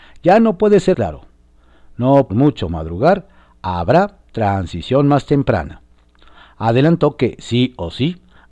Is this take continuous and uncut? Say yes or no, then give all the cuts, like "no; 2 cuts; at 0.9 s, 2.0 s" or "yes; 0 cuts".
no; 2 cuts; at 0.9 s, 2.3 s